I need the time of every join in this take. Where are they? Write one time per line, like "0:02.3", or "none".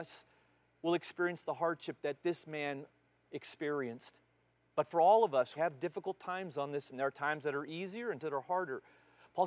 0:05.6
0:06.9
0:08.2